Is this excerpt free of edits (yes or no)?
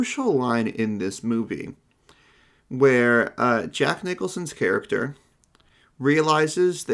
yes